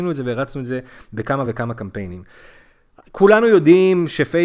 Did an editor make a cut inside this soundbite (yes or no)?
no